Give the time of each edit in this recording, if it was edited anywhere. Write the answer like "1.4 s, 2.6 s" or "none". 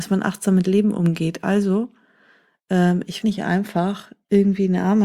3.2 s